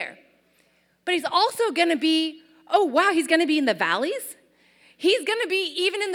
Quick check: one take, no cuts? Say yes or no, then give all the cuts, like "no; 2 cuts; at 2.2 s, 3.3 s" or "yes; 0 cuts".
yes; 0 cuts